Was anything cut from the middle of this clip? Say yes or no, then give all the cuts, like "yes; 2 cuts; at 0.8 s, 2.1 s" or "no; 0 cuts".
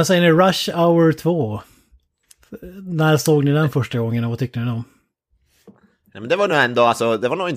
no; 0 cuts